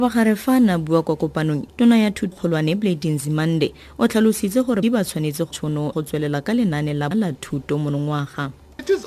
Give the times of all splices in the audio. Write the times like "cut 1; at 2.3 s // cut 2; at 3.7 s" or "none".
cut 1; at 1.7 s // cut 2; at 2.3 s // cut 3; at 4.8 s // cut 4; at 5.5 s // cut 5; at 5.9 s // cut 6; at 7.1 s